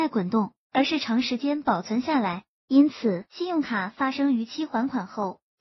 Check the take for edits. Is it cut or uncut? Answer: cut